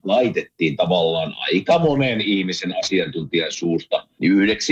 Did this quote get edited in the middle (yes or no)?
no